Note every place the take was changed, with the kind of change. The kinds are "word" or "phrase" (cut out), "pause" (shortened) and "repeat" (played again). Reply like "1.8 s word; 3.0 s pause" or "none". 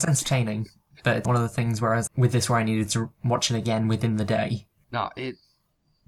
1.2 s word; 2.1 s word; 4.8 s word